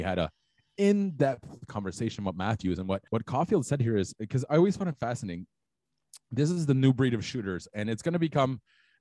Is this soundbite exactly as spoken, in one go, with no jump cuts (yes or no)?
no